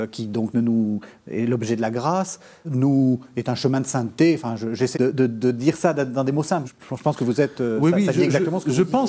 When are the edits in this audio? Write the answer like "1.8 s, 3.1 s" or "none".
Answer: 2.6 s, 4.9 s, 6.6 s